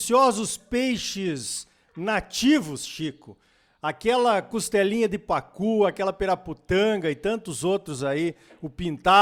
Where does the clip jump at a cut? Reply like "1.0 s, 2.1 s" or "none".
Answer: none